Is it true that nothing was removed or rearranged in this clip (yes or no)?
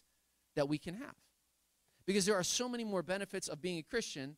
yes